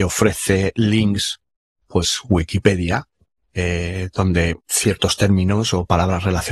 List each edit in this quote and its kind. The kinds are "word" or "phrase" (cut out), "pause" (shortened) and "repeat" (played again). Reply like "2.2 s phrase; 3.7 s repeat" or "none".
1.9 s phrase; 4.6 s pause

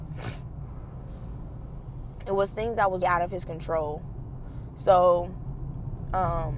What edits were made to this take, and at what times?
3.0 s word

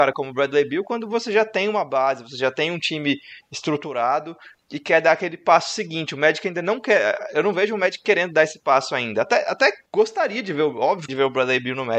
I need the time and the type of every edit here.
9.9 s pause; 11.1 s phrase

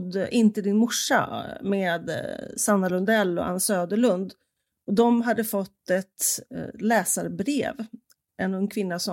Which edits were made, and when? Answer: none

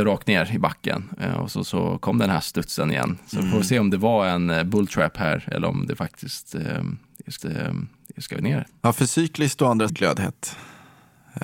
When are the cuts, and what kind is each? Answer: 7.4 s repeat; 9.9 s phrase

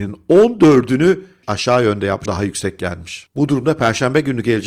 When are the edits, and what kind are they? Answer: 1.4 s phrase; 2.3 s word

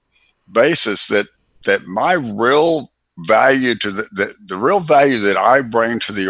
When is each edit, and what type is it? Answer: none

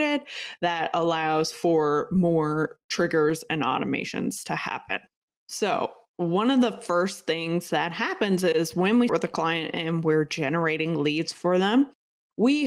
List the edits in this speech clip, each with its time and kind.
5.3 s pause; 9.1 s word

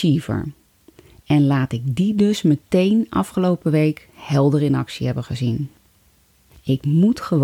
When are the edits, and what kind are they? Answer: none

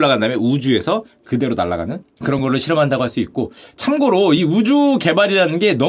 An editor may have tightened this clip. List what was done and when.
none

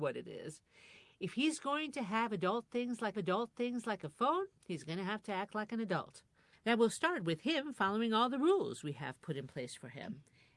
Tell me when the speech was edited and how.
3.1 s repeat

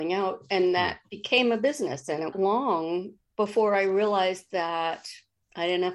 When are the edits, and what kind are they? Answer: 2.3 s phrase

